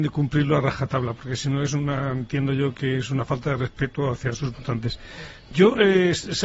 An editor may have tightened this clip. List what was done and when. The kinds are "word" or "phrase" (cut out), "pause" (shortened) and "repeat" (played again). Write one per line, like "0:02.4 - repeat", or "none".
none